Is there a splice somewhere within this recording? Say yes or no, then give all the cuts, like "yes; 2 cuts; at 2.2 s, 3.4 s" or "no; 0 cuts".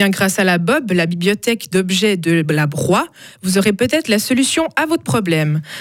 no; 0 cuts